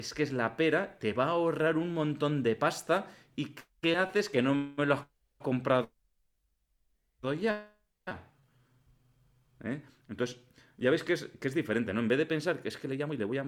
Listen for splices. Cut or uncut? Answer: uncut